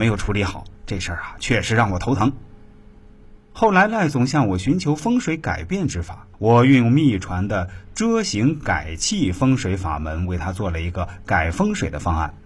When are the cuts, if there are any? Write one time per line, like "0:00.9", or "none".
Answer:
0:06.3